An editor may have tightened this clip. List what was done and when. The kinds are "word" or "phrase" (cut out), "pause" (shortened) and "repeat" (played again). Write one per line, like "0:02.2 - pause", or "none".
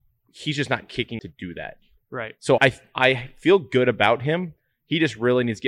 0:01.2 - phrase
0:02.6 - word